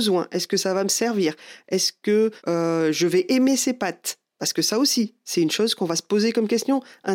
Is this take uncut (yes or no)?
no